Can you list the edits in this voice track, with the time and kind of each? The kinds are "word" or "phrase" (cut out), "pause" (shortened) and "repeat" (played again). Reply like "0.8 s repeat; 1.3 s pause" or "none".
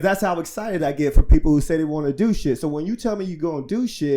none